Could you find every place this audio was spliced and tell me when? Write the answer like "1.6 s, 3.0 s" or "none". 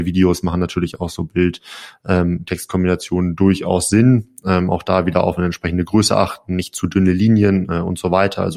none